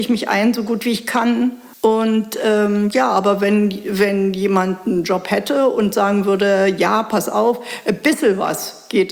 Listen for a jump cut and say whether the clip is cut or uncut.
cut